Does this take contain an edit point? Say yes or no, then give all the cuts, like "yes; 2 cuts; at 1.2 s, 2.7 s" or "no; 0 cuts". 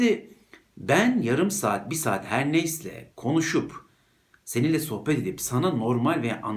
no; 0 cuts